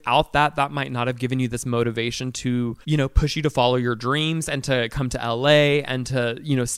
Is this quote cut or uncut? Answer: cut